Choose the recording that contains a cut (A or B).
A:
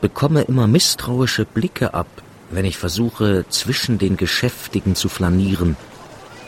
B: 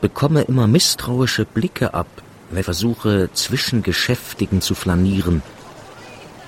B